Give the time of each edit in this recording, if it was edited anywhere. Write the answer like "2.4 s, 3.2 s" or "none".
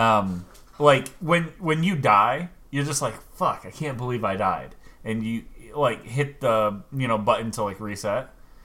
none